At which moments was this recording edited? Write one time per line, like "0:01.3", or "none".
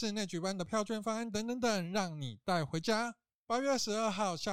none